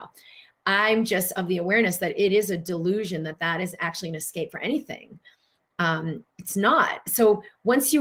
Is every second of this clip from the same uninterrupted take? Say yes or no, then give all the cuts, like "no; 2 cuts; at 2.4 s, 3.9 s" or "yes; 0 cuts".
yes; 0 cuts